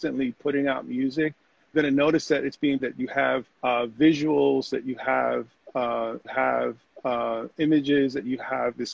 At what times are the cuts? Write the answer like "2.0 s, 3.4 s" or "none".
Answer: 1.7 s, 2.8 s, 3.5 s, 6.2 s